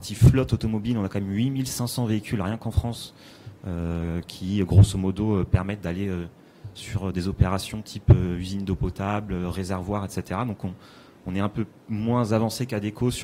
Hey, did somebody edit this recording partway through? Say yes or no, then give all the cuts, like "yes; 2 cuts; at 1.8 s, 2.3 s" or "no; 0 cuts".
no; 0 cuts